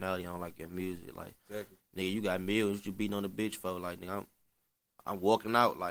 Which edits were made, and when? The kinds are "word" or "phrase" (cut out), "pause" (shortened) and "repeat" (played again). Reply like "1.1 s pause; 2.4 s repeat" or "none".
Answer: 1.4 s pause